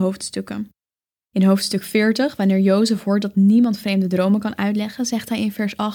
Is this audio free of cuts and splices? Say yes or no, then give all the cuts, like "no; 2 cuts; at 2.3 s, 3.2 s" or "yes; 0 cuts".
yes; 0 cuts